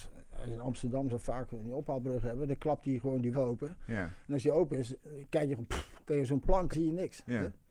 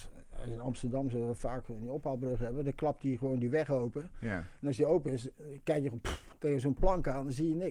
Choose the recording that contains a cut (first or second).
first